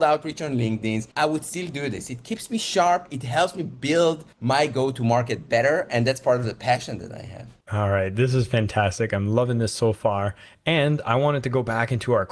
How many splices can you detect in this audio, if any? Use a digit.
3